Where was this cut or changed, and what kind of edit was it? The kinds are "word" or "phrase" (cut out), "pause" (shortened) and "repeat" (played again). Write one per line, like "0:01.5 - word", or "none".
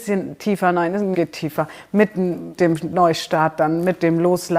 0:01.1 - word
0:02.6 - word